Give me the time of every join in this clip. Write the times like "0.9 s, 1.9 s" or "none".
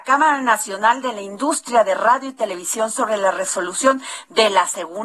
none